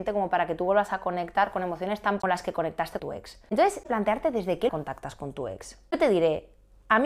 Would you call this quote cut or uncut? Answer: cut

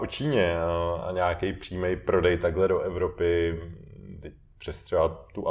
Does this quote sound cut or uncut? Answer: uncut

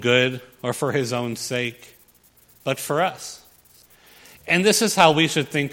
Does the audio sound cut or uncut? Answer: uncut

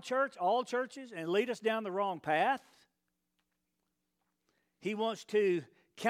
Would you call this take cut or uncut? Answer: uncut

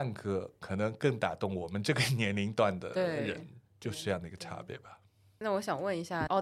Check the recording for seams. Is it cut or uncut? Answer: uncut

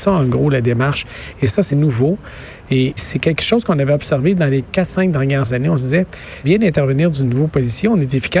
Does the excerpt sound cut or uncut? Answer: cut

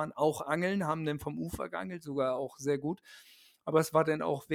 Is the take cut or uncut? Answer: uncut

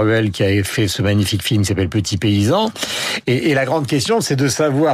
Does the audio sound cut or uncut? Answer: uncut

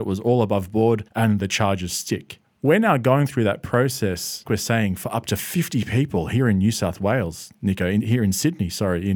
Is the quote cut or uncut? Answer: cut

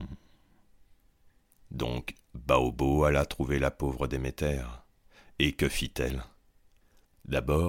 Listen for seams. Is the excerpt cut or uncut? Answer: uncut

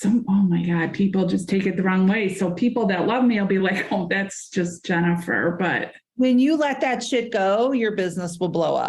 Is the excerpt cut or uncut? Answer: uncut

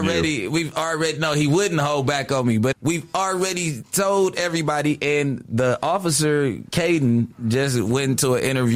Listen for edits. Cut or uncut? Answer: cut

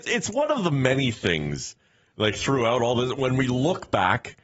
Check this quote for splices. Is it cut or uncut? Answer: uncut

